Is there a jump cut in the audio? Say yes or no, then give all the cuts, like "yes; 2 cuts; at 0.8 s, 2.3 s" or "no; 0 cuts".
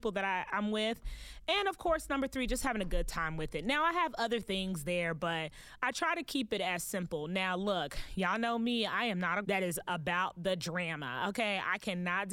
yes; 1 cut; at 9.4 s